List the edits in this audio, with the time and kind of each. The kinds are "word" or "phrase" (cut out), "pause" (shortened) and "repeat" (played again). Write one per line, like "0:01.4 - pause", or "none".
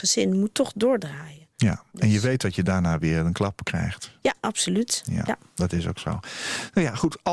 0:01.9 - pause